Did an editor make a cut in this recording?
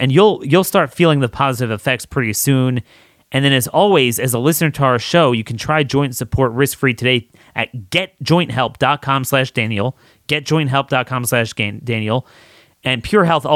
no; 0 cuts

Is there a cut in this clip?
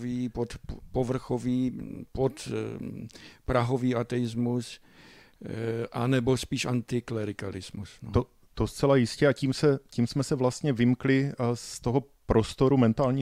no; 0 cuts

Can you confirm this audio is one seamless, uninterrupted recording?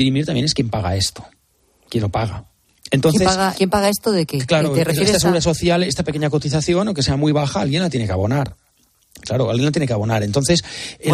no; 1 cut; at 3.5 s

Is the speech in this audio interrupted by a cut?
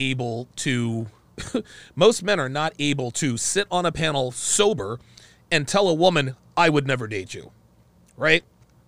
no; 0 cuts

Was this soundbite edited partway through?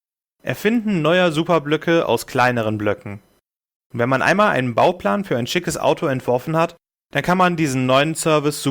no; 0 cuts

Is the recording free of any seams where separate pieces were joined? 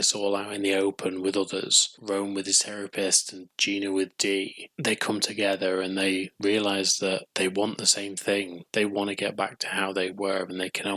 yes; 0 cuts

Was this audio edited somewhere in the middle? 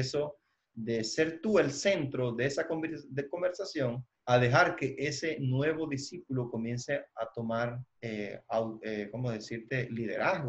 yes; 2 cuts; at 4.1 s, 8.0 s

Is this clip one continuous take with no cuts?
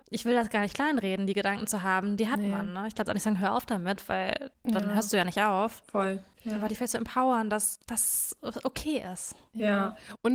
no; 2 cuts; at 3.1 s, 7.8 s

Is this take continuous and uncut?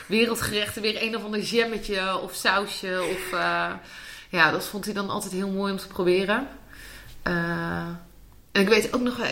yes; 0 cuts

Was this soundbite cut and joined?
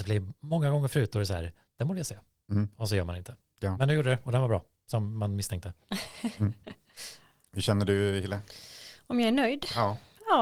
no; 0 cuts

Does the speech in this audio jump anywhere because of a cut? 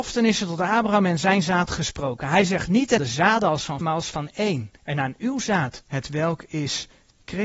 yes; 4 cuts; at 3.0 s, 3.8 s, 4.8 s, 5.8 s

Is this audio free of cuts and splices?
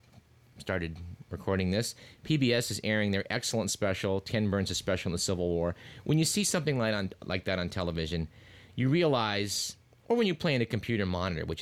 yes; 0 cuts

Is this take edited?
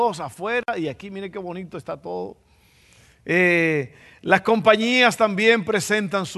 no; 0 cuts

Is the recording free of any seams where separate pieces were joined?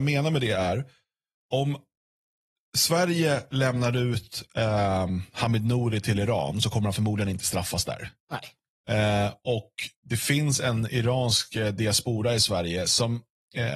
no; 1 cut; at 8.2 s

